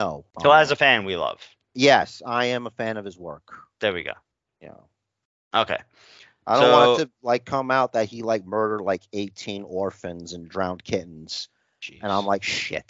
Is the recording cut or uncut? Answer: uncut